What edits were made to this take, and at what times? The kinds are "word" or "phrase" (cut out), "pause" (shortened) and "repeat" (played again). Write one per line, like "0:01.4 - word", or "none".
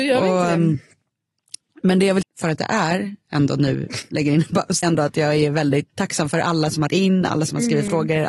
0:02.2 - word
0:04.0 - word
0:04.8 - word
0:05.9 - word
0:06.9 - word